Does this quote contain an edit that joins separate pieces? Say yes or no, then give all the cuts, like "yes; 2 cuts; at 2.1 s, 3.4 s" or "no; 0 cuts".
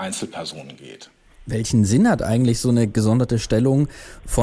no; 0 cuts